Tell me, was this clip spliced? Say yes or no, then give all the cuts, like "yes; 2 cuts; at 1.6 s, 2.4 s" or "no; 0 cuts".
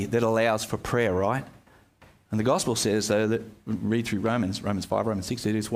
no; 0 cuts